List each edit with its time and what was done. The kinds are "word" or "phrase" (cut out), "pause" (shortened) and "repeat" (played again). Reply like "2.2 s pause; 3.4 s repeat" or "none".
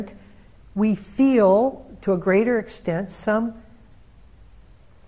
none